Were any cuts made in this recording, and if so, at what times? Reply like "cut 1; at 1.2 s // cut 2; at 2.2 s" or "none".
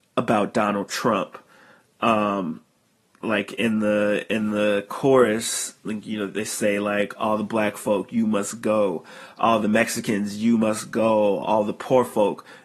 none